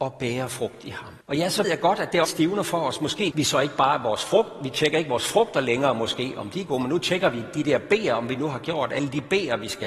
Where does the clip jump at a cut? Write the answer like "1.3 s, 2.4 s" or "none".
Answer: 1.2 s, 1.6 s, 2.2 s, 3.3 s